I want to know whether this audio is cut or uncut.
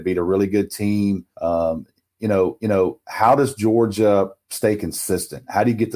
cut